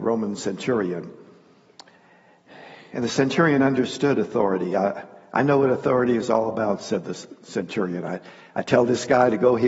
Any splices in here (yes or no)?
no